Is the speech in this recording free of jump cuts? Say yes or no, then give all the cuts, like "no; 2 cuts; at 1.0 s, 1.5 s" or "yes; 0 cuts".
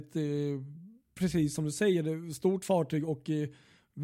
yes; 0 cuts